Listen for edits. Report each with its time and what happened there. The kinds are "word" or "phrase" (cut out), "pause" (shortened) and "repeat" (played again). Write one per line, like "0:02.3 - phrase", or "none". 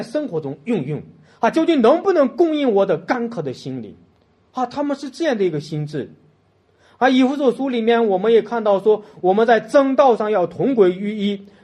none